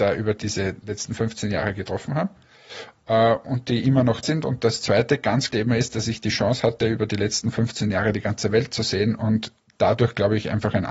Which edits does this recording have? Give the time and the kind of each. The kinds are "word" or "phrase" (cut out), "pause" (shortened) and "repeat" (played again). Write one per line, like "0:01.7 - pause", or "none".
0:04.2 - word
0:05.5 - word